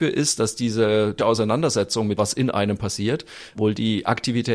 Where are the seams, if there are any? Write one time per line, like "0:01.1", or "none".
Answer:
0:01.2
0:02.2
0:03.5

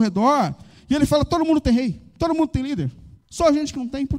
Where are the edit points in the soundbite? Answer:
0:03.2

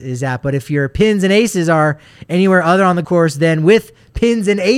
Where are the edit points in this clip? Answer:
0:03.0

